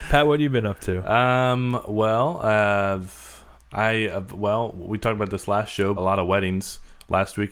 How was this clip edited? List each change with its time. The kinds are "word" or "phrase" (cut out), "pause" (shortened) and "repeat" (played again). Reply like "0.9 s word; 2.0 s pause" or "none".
3.5 s pause; 6.0 s word

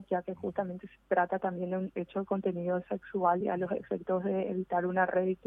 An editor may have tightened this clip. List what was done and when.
none

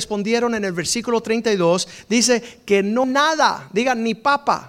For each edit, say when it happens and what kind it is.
3.0 s word

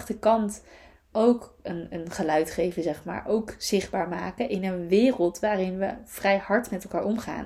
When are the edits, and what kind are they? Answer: none

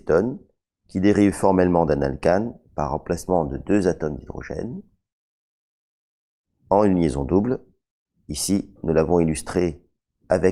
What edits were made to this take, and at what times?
none

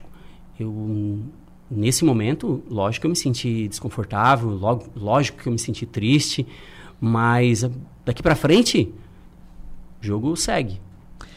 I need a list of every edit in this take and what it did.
none

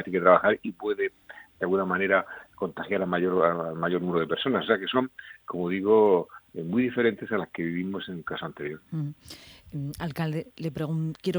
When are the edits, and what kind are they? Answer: 5.4 s word

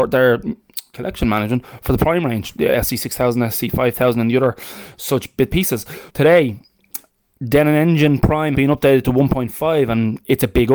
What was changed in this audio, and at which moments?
5.5 s word; 6.1 s pause; 8.5 s word

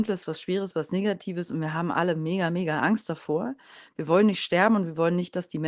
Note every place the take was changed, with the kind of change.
none

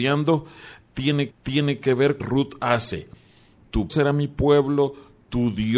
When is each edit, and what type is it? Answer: 1.3 s repeat; 2.2 s phrase; 3.9 s word

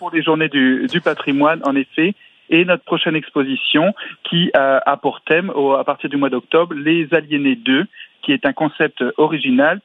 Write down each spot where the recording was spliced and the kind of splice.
none

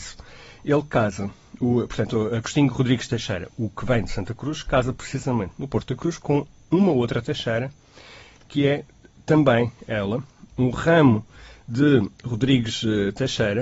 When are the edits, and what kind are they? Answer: none

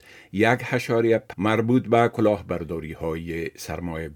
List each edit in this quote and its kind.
1.3 s phrase

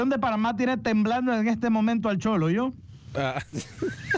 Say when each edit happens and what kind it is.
none

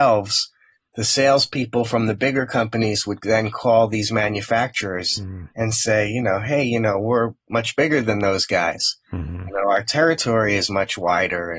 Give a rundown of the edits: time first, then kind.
5.5 s pause

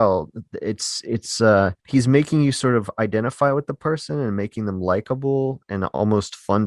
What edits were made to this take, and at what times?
1.8 s pause

